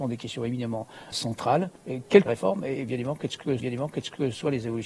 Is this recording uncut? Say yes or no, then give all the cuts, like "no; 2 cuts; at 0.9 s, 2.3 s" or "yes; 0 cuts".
no; 4 cuts; at 1.1 s, 1.8 s, 2.3 s, 3.6 s